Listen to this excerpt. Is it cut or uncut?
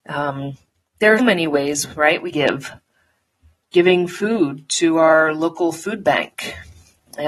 cut